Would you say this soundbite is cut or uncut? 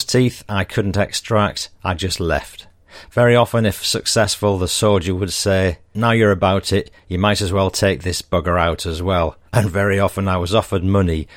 cut